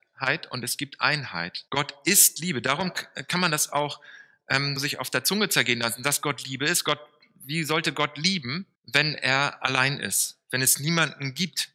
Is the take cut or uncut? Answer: cut